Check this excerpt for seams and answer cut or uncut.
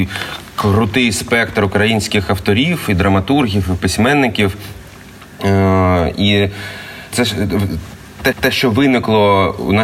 cut